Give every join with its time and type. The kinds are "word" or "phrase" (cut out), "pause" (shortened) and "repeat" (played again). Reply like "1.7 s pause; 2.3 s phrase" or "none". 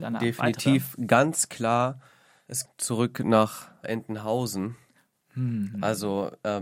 2.7 s phrase; 3.8 s word